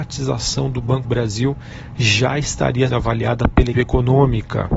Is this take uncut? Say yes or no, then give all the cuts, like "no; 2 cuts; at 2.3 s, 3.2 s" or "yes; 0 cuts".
no; 3 cuts; at 1.0 s, 2.9 s, 3.7 s